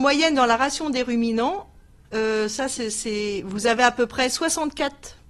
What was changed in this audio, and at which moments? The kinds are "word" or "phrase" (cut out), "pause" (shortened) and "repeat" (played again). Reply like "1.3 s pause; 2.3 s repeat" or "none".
none

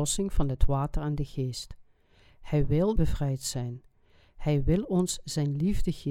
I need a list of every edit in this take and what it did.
3.0 s phrase

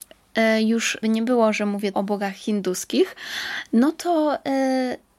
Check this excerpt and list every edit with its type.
1.0 s word; 1.9 s word

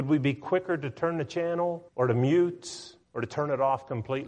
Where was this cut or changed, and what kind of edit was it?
1.9 s pause; 3.0 s pause

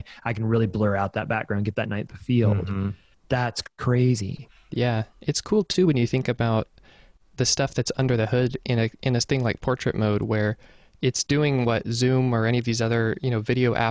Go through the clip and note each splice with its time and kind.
2.1 s word; 3.1 s pause

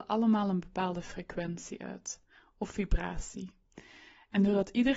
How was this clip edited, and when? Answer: none

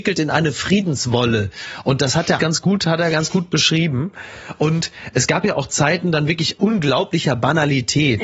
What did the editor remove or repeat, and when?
2.4 s word

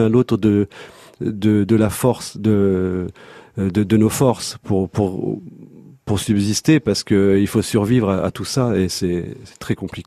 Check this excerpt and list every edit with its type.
none

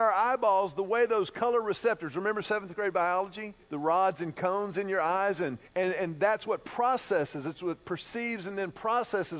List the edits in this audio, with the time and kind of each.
3.6 s pause; 5.7 s pause

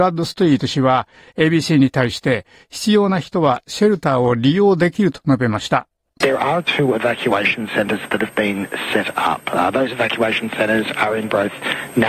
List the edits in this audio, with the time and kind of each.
none

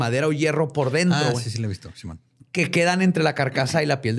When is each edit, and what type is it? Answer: none

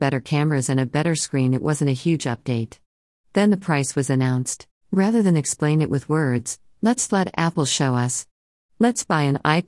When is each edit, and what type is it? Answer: 4.7 s pause

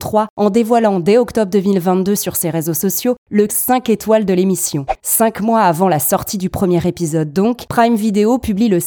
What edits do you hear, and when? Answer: 3.5 s word

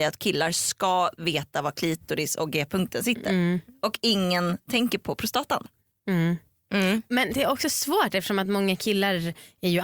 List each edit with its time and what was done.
none

